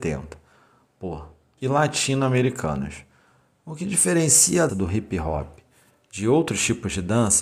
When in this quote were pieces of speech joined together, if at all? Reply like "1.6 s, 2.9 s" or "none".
1.6 s, 4.7 s

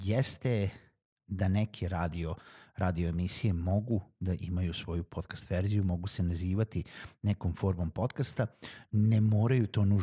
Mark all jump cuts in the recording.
none

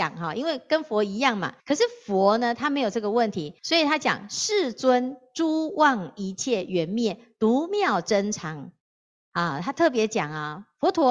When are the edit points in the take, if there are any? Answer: 1.6 s, 3.6 s

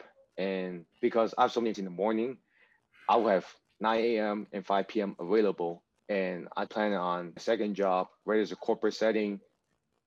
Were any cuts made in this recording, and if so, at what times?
0.9 s, 1.7 s, 3.7 s, 6.0 s, 6.7 s, 7.4 s

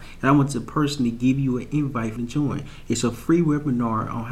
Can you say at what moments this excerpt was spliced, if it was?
2.2 s

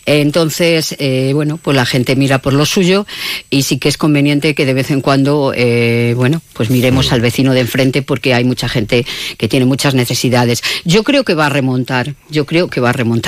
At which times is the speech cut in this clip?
none

